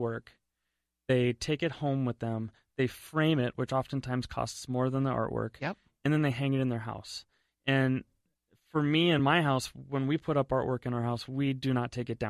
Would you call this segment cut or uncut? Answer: uncut